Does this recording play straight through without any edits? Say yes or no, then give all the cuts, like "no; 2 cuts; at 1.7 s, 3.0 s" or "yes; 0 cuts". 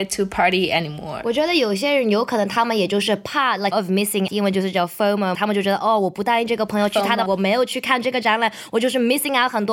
no; 4 cuts; at 3.7 s, 4.3 s, 5.3 s, 7.3 s